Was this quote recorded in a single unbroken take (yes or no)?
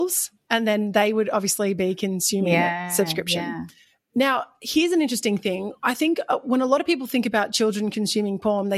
yes